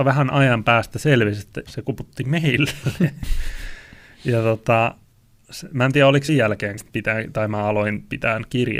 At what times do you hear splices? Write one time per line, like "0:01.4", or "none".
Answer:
0:01.7
0:06.3
0:06.8